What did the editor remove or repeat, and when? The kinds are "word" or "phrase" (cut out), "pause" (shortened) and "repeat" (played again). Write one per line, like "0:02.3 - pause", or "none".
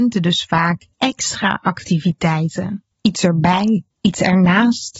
0:00.9 - pause
0:02.9 - pause
0:03.9 - pause